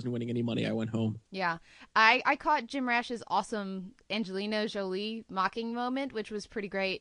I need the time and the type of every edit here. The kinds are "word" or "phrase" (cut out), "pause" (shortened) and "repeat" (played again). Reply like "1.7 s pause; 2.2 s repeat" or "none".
1.3 s pause